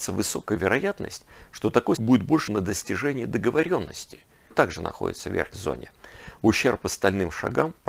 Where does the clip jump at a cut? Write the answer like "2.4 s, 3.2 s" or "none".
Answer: 2.0 s, 2.5 s, 4.5 s, 5.5 s